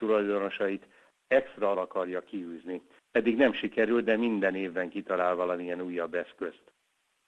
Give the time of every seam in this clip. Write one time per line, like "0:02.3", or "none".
0:01.7